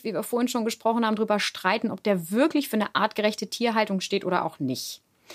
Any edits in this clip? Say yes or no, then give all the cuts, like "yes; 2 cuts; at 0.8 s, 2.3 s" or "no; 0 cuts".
no; 0 cuts